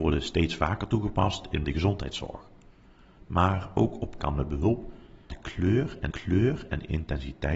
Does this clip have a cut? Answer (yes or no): yes